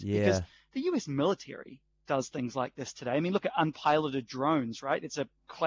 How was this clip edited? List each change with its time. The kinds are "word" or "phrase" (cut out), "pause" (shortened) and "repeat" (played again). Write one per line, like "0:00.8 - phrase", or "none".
none